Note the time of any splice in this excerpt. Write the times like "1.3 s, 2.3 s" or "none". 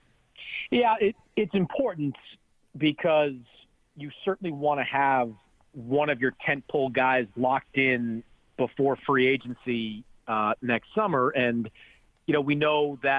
none